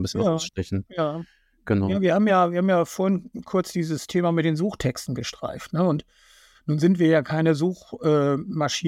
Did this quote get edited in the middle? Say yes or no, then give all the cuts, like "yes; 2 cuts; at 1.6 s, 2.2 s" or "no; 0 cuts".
no; 0 cuts